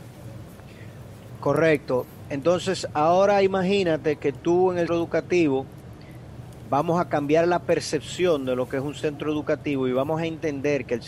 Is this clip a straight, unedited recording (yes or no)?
no